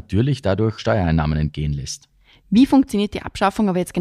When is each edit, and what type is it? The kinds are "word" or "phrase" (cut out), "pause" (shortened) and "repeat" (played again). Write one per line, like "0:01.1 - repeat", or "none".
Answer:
none